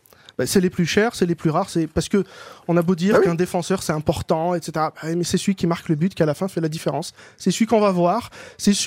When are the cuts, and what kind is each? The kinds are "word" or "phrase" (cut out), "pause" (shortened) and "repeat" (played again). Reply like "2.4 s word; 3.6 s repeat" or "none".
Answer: none